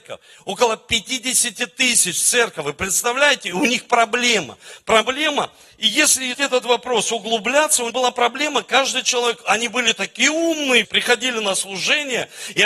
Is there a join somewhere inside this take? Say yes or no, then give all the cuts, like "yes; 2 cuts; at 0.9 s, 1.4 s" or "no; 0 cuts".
yes; 3 cuts; at 6.3 s, 7.9 s, 10.8 s